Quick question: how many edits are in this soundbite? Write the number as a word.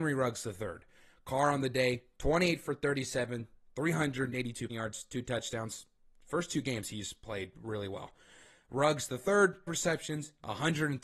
two